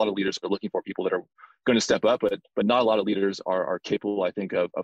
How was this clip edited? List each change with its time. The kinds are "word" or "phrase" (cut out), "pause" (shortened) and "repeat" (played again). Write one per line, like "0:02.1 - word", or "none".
none